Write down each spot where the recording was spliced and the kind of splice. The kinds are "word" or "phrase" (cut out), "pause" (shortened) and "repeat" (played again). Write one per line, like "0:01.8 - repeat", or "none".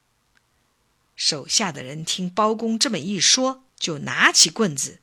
0:03.7 - pause